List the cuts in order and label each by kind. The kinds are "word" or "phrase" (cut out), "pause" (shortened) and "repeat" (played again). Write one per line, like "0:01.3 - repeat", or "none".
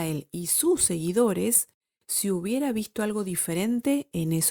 none